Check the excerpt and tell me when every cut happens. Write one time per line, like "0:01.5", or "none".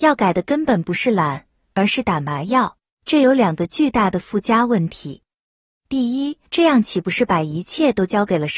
0:02.9
0:06.5